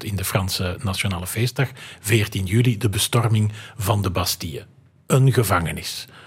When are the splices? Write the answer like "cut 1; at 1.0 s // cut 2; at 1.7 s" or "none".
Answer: none